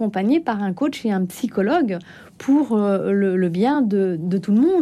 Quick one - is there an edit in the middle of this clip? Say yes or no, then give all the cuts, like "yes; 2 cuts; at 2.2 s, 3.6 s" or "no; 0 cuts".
no; 0 cuts